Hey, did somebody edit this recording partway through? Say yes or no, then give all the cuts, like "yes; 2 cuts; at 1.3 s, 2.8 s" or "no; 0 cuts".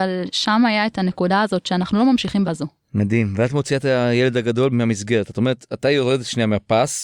yes; 3 cuts; at 2.4 s, 2.8 s, 4.7 s